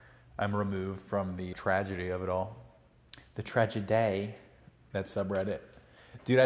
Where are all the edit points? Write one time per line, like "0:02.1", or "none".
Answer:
0:01.5